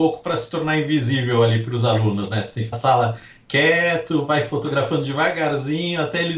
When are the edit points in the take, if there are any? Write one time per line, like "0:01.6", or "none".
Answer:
0:02.7